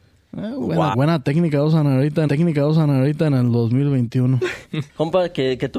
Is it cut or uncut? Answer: cut